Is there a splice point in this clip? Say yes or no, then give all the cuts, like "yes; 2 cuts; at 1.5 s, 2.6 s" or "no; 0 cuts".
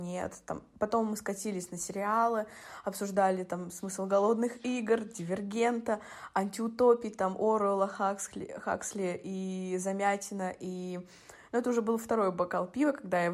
no; 0 cuts